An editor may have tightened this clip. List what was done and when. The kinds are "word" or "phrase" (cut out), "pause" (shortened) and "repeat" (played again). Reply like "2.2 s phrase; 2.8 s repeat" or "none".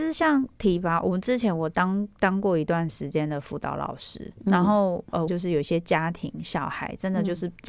5.3 s phrase